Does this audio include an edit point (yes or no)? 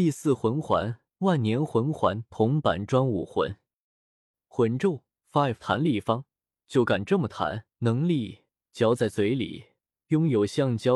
yes